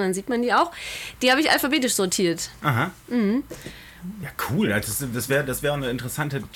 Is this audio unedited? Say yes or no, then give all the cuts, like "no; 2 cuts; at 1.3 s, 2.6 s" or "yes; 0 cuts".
yes; 0 cuts